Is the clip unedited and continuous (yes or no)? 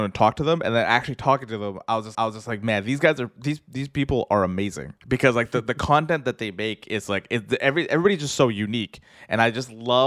no